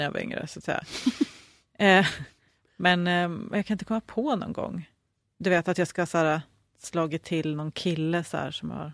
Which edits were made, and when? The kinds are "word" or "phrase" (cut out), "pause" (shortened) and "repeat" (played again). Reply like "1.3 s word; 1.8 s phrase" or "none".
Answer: none